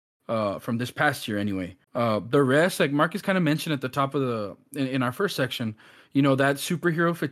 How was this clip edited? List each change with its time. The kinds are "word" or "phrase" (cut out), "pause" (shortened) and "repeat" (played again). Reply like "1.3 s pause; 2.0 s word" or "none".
1.8 s pause